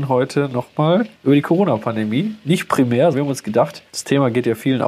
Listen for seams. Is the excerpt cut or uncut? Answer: cut